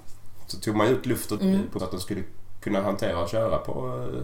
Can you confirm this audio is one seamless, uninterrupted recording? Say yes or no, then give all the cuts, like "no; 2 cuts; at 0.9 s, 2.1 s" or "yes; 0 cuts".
no; 2 cuts; at 1.4 s, 1.8 s